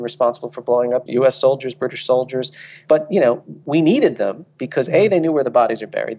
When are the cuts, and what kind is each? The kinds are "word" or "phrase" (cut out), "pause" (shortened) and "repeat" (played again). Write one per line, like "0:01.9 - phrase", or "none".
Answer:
0:01.1 - word